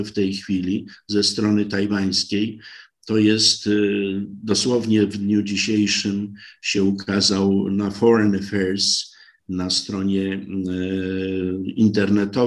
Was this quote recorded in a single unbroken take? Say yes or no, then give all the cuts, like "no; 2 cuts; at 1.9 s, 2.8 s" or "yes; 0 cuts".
yes; 0 cuts